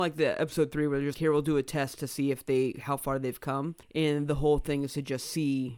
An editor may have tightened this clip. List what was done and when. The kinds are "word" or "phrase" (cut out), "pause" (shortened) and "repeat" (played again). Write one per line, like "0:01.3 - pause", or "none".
0:01.1 - word
0:03.8 - pause

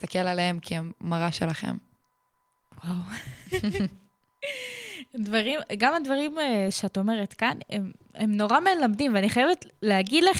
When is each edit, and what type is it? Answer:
none

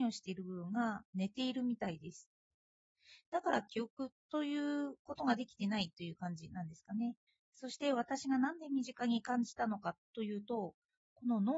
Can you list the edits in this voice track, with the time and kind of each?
0:01.1 - pause
0:04.2 - pause
0:07.3 - pause

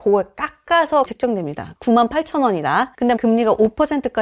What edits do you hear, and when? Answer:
0:01.0 - word
0:03.2 - word

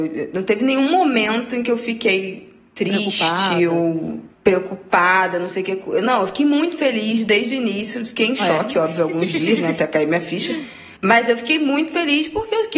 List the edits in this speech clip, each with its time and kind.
0:04.3 - pause
0:11.0 - pause

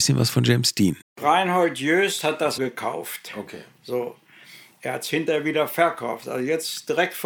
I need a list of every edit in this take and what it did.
0:01.0 - pause
0:02.6 - word

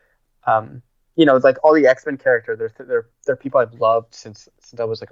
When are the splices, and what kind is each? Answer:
none

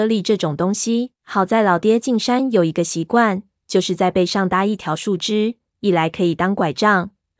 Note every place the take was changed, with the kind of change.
0:01.2 - pause

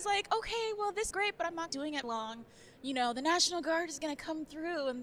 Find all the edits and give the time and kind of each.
0:01.1 - word
0:01.7 - phrase
0:02.0 - word

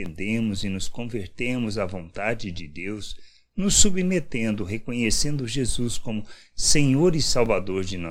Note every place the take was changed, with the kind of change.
none

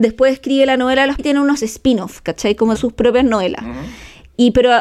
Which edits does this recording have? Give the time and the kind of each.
0:01.2 - word
0:02.7 - word

